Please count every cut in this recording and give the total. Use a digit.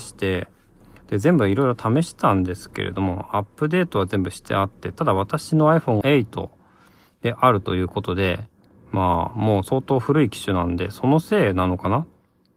1